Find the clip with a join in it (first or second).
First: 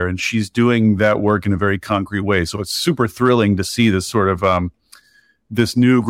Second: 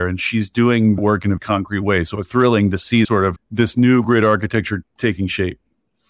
second